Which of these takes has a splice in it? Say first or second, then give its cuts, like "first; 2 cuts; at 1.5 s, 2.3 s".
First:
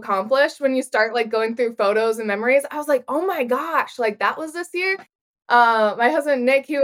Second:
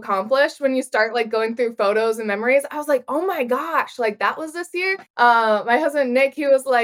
second; 1 cut; at 5.1 s